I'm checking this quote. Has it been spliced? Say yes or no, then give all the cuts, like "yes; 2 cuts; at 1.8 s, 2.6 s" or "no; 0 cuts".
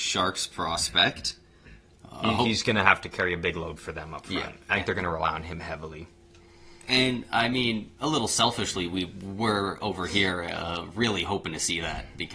no; 0 cuts